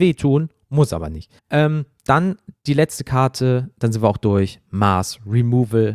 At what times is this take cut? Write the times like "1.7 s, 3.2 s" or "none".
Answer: 1.4 s